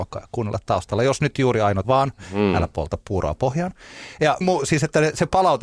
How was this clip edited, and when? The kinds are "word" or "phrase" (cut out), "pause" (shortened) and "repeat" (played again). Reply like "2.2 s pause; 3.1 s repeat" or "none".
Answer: 1.8 s phrase; 4.4 s word